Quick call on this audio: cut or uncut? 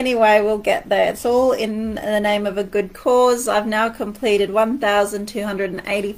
uncut